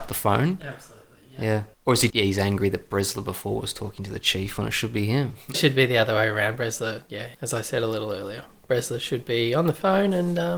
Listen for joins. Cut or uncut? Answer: cut